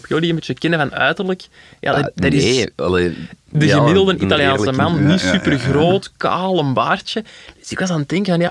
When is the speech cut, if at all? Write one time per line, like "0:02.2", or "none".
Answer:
none